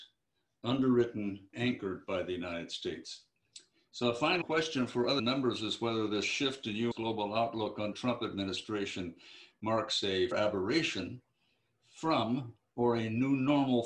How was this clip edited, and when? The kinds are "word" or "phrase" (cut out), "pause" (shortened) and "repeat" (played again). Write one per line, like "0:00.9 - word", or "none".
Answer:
0:01.5 - word
0:04.4 - word
0:05.2 - word
0:06.9 - word
0:07.9 - word
0:10.3 - word